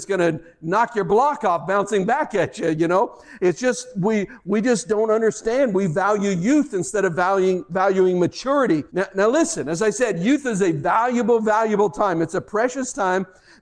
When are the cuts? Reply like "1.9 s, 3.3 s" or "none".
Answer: 8.9 s